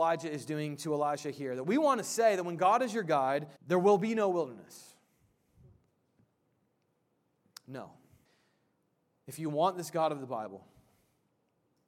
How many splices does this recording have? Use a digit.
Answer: 2